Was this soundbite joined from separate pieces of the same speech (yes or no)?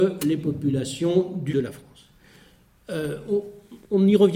yes